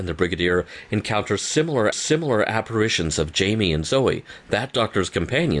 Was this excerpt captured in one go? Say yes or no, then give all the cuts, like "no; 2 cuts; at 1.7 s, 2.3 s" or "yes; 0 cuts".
no; 1 cut; at 1.9 s